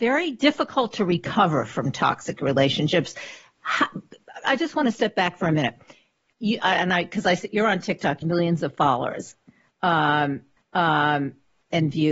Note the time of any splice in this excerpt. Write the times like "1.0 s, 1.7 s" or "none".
4.4 s, 8.2 s, 10.6 s